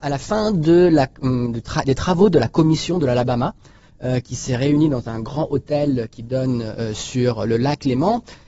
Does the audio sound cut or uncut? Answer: uncut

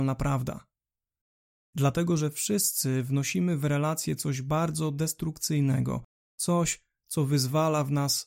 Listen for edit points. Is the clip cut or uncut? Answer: uncut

